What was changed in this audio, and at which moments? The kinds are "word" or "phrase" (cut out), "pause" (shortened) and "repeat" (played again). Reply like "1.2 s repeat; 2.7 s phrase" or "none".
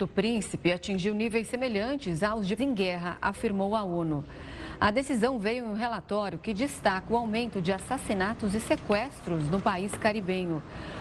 2.6 s word